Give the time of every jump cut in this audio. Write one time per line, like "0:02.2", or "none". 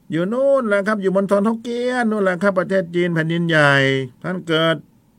0:04.1